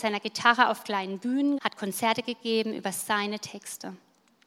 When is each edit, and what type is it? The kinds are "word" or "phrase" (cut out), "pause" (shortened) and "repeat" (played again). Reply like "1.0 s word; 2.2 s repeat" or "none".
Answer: 1.6 s word